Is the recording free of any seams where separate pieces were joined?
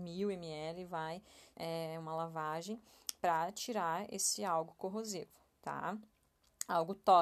no; 1 cut; at 1.5 s

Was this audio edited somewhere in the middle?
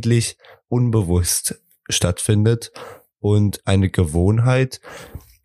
no; 0 cuts

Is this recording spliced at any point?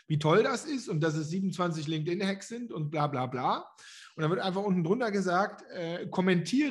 no; 0 cuts

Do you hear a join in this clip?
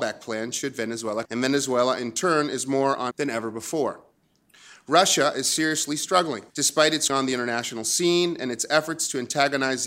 yes; 4 cuts; at 1.2 s, 3.1 s, 6.5 s, 7.1 s

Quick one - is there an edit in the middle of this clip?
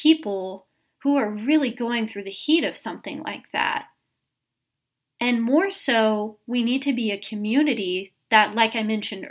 no; 0 cuts

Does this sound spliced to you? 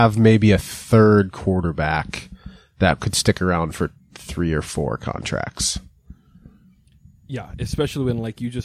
no; 0 cuts

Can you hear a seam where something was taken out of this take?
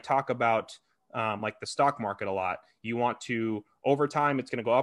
no; 0 cuts

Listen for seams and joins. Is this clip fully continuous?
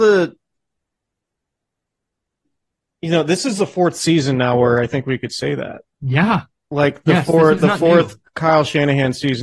no; 1 cut; at 5.9 s

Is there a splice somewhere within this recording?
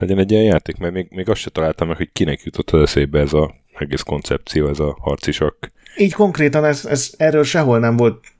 yes; 1 cut; at 3.6 s

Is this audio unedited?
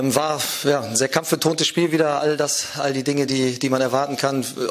yes; 0 cuts

